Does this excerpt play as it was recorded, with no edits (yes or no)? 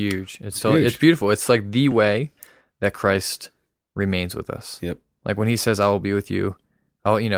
yes